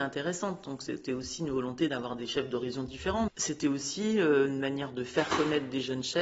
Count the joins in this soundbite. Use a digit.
1